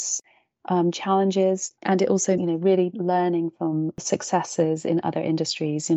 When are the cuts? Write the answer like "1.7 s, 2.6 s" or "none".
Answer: 1.8 s, 2.4 s